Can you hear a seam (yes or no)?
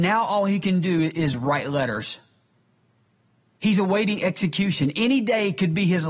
no